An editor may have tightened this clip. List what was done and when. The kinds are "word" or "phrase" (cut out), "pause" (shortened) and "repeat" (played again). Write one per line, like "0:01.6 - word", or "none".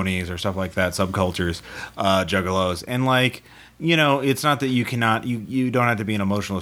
none